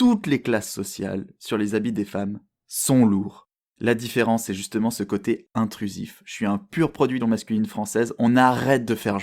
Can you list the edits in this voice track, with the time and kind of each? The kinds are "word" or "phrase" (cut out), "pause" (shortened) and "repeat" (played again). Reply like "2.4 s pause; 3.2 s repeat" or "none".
7.2 s word